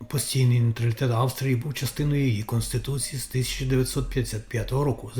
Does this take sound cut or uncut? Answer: uncut